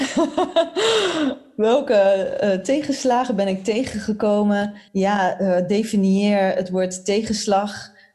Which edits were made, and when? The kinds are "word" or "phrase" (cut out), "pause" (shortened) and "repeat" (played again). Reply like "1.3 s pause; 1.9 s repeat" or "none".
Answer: 4.9 s pause